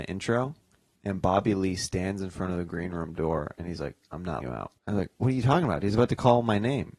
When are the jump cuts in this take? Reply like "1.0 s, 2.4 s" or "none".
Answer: 4.4 s, 4.8 s